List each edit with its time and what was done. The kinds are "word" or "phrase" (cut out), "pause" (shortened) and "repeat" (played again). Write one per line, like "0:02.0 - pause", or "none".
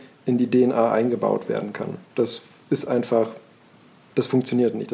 none